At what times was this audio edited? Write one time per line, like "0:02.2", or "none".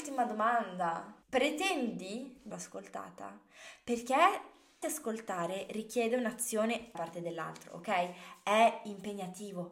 0:01.2
0:02.5
0:04.8
0:06.9